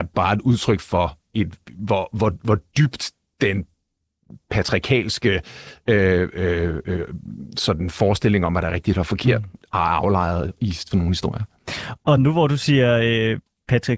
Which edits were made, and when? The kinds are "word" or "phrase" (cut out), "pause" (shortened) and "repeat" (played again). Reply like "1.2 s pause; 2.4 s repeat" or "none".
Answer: none